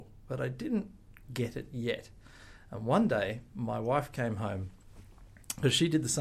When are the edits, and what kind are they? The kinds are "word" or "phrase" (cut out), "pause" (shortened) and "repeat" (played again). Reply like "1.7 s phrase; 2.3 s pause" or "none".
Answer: 1.2 s word